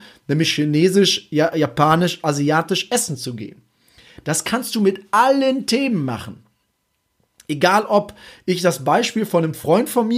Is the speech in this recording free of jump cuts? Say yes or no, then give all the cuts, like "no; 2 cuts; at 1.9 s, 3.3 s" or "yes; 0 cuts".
yes; 0 cuts